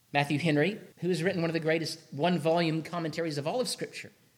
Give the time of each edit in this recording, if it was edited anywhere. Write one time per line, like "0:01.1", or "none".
0:00.9